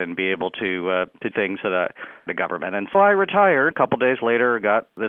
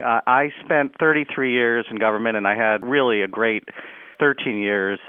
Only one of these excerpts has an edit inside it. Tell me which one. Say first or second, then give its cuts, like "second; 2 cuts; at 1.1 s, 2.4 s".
first; 4 cuts; at 1.3 s, 2.3 s, 2.9 s, 3.7 s